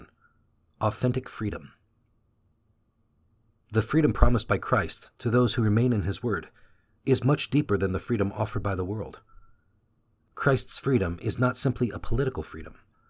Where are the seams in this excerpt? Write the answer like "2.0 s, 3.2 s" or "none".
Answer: none